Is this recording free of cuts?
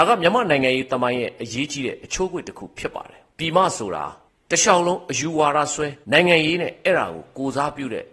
no; 3 cuts; at 3.3 s, 4.3 s, 6.0 s

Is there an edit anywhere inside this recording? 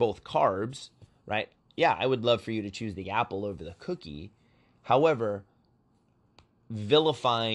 no; 0 cuts

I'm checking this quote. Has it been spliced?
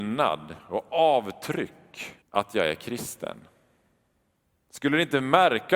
yes; 1 cut; at 2.2 s

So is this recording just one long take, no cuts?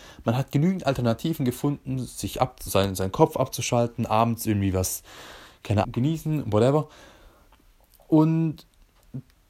no; 2 cuts; at 2.7 s, 5.8 s

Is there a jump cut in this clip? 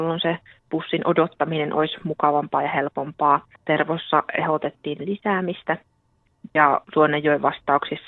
yes; 2 cuts; at 3.6 s, 5.0 s

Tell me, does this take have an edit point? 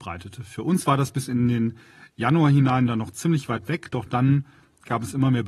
no; 0 cuts

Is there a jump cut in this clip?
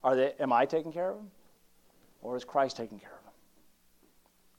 no; 0 cuts

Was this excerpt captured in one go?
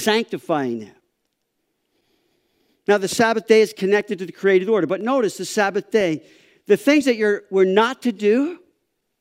yes; 0 cuts

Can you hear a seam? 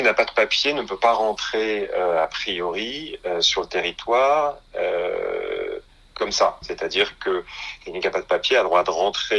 no; 0 cuts

